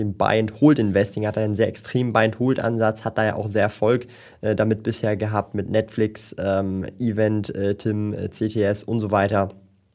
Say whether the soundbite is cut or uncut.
uncut